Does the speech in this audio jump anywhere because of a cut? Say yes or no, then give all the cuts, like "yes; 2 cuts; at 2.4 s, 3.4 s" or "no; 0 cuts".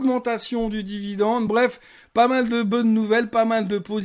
no; 0 cuts